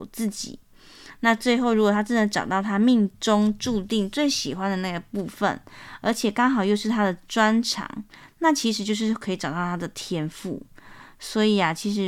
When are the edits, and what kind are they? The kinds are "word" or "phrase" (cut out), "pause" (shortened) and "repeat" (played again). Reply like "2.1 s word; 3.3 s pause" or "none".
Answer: none